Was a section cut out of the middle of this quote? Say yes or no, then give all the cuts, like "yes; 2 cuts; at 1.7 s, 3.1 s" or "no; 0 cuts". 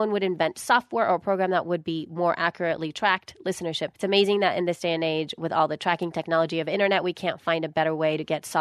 yes; 1 cut; at 4.0 s